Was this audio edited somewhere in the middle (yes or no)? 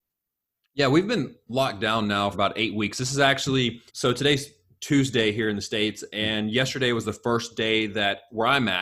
yes